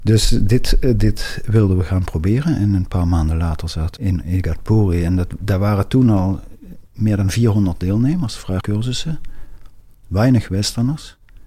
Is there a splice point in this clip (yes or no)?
yes